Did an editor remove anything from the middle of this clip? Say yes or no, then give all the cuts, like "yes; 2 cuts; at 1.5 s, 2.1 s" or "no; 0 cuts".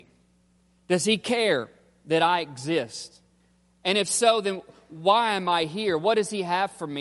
no; 0 cuts